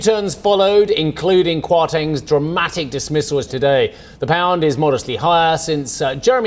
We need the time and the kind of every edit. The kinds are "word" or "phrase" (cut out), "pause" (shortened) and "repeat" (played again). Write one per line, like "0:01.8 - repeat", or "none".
0:03.5 - phrase